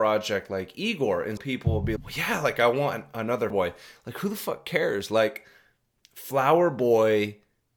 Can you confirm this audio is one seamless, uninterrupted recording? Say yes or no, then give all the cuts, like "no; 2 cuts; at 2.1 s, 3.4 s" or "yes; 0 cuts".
no; 3 cuts; at 1.4 s, 2.0 s, 3.5 s